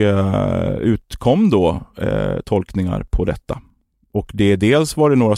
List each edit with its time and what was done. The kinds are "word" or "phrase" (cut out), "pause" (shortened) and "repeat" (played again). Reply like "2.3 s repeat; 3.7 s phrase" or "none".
none